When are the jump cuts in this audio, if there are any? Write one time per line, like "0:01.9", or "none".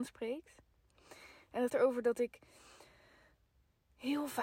0:01.7